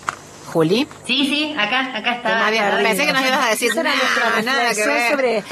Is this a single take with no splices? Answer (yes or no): no